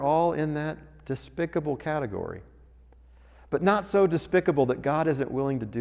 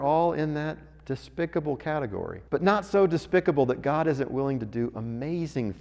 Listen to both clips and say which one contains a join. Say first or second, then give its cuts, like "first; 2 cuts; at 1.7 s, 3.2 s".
second; 1 cut; at 2.5 s